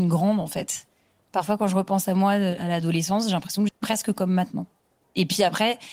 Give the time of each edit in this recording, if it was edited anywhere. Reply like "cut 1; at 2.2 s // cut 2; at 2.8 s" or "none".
cut 1; at 3.7 s